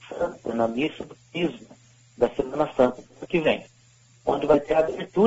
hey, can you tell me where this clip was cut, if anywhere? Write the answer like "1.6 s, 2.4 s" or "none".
none